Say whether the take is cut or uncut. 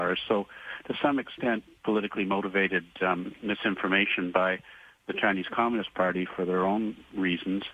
uncut